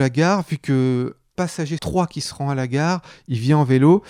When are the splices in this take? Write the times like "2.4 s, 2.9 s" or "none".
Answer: 1.4 s, 1.8 s